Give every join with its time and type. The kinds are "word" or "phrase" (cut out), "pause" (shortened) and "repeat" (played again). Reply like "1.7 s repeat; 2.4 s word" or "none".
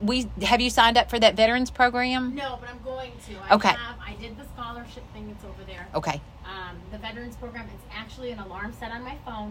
none